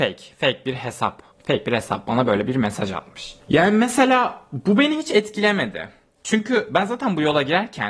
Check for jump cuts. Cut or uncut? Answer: cut